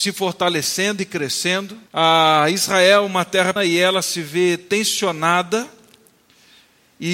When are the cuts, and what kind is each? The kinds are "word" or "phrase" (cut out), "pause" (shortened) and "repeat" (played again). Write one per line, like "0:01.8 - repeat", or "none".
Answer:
0:01.9 - pause
0:03.6 - word